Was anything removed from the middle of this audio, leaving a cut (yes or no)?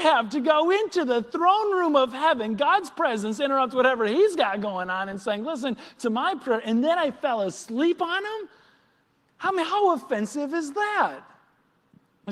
no